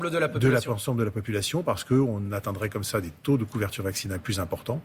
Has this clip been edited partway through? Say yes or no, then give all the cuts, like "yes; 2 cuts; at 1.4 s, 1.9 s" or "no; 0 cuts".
no; 0 cuts